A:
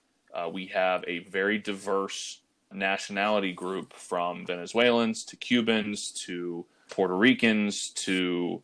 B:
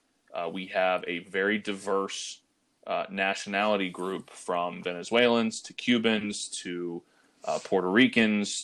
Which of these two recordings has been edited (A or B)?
A